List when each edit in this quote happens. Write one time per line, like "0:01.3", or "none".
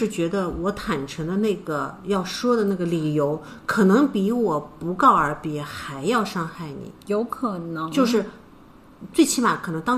0:07.0